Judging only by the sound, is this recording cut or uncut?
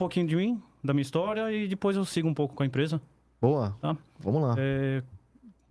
uncut